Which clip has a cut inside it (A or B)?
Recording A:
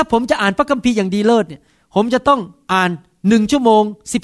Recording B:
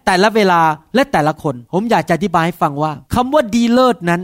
B